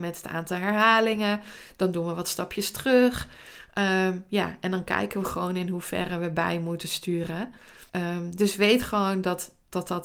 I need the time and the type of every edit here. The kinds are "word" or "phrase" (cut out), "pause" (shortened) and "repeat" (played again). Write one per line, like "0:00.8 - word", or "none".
0:07.9 - pause